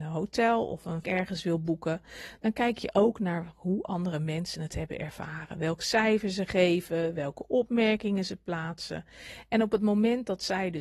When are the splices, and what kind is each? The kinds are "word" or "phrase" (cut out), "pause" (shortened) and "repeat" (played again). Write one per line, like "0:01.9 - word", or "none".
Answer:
0:01.0 - word